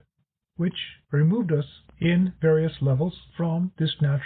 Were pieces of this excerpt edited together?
no; 0 cuts

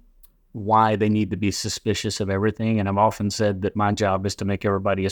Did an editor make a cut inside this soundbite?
no; 0 cuts

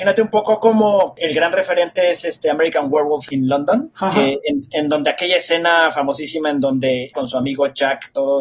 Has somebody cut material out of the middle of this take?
yes; 1 cut; at 7.1 s

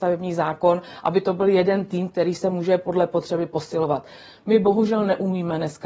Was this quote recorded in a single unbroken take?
yes; 0 cuts

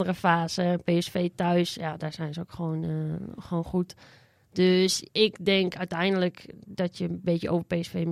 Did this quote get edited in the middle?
no; 0 cuts

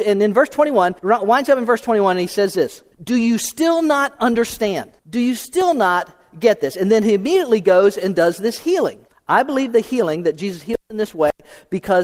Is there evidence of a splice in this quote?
yes; 4 cuts; at 1.0 s, 2.9 s, 5.0 s, 9.1 s

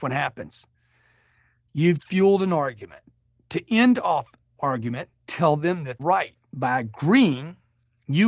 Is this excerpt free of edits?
no; 4 cuts; at 2.0 s, 4.6 s, 5.3 s, 6.0 s

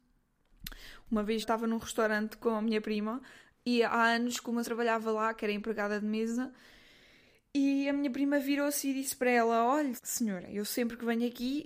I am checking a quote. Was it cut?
yes; 3 cuts; at 1.4 s, 4.6 s, 10.0 s

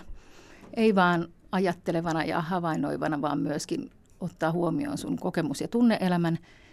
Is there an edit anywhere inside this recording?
no; 0 cuts

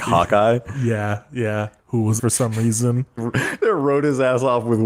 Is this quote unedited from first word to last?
no; 3 cuts; at 1.8 s, 2.2 s, 3.2 s

